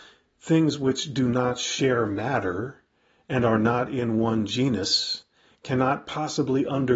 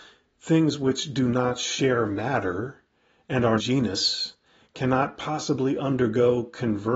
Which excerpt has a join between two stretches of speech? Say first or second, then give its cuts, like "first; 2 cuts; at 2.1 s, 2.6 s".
second; 1 cut; at 3.6 s